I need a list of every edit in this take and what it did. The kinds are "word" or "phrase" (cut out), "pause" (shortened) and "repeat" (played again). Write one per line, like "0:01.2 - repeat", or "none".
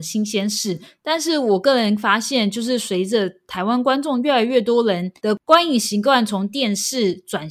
0:05.2 - pause